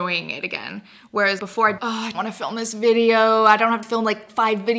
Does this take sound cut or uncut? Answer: cut